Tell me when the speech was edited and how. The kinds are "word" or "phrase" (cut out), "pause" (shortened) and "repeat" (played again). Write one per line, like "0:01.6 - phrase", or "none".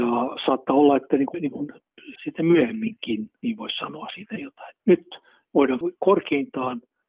0:01.3 - phrase
0:02.1 - word
0:03.4 - pause
0:04.8 - pause